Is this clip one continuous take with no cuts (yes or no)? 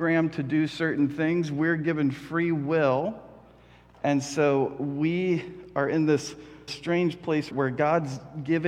no